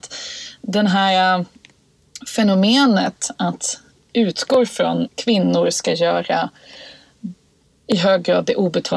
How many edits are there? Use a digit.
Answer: 2